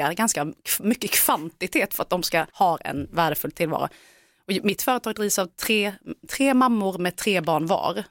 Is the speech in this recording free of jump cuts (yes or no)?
no